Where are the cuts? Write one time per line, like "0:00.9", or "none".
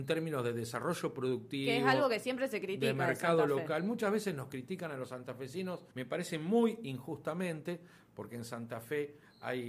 0:05.9